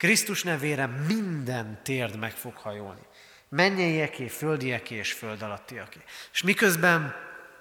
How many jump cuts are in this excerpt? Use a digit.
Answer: 0